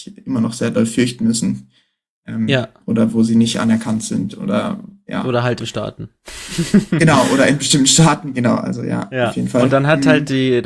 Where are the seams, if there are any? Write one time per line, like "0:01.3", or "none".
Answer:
0:05.6

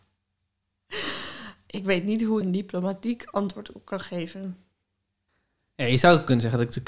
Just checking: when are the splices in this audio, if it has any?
0:02.4

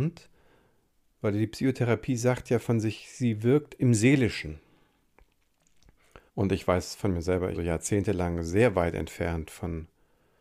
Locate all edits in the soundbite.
0:06.3
0:07.5

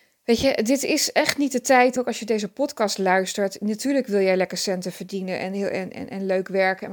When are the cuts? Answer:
0:02.0

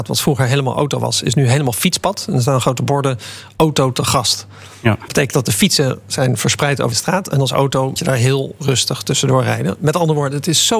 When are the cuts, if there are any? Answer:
0:05.1
0:06.9
0:08.0

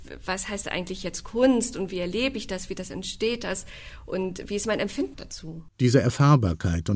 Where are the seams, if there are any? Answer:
0:05.1
0:05.7

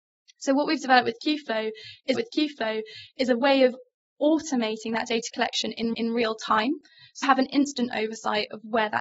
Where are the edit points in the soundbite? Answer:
0:02.1
0:05.9
0:07.2

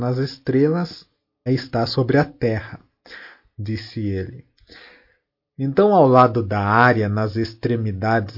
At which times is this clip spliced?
0:01.5

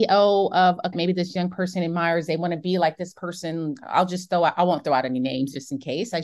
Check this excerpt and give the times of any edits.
0:00.9

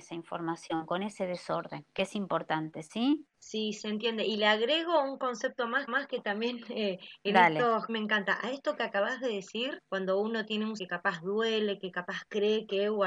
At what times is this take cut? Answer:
0:01.9
0:03.3
0:05.9
0:07.9
0:09.8
0:10.8

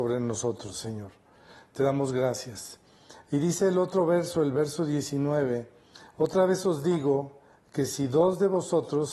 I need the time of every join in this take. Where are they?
none

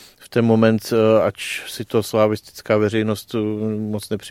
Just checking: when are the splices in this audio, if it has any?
none

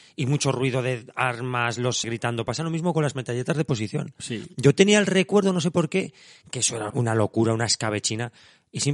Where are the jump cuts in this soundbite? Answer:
0:02.0
0:06.9

